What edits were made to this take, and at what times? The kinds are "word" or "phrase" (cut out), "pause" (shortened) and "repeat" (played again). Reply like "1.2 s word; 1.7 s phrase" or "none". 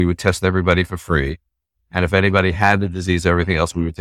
none